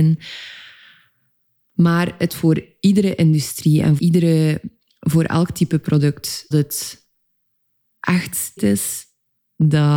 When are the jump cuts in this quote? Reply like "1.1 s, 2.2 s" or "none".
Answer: 2.3 s, 4.0 s, 6.5 s, 8.6 s